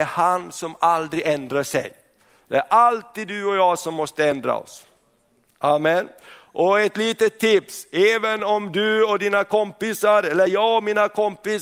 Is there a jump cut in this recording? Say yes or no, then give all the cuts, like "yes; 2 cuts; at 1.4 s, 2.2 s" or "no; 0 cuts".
no; 0 cuts